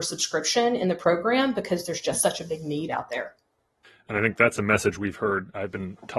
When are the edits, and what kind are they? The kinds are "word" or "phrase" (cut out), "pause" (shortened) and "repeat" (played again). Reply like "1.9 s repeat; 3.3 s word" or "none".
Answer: none